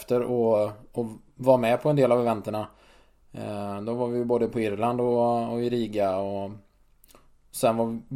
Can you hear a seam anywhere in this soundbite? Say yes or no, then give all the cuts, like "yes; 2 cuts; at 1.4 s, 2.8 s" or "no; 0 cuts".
no; 0 cuts